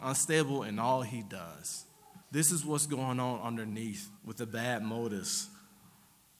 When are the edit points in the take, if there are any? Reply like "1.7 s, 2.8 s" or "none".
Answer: 2.2 s, 4.2 s